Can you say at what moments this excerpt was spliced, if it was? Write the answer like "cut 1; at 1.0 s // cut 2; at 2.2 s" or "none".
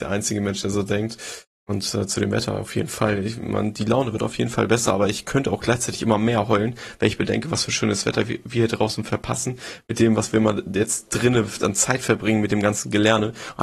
none